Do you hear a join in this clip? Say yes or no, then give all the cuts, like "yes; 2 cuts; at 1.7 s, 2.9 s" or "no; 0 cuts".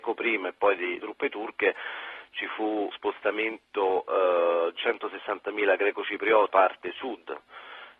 yes; 4 cuts; at 1.0 s, 2.9 s, 4.8 s, 6.5 s